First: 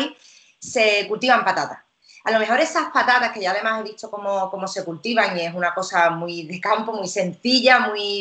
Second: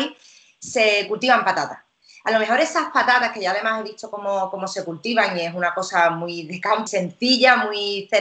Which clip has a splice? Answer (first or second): second